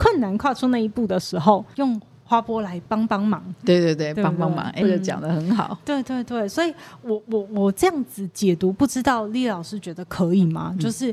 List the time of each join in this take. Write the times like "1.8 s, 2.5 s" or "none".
1.7 s, 4.8 s